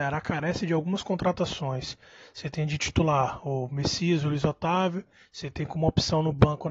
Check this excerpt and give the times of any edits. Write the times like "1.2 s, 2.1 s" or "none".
none